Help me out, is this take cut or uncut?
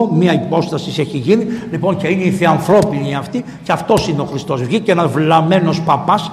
uncut